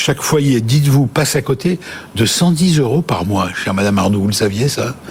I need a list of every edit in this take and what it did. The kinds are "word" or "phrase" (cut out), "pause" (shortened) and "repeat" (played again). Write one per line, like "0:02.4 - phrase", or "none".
none